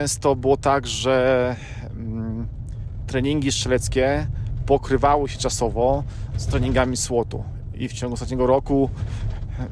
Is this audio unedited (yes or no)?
yes